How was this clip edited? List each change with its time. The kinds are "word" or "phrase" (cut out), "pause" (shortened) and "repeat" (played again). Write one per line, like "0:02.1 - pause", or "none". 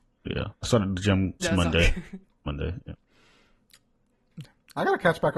0:02.2 - pause